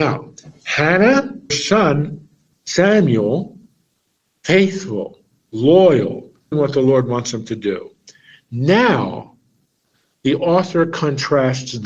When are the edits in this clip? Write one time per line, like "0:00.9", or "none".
0:01.5
0:06.5